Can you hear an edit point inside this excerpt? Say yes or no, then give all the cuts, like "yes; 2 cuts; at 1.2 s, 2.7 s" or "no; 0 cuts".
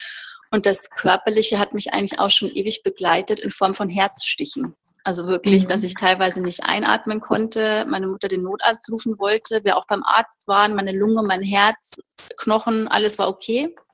no; 0 cuts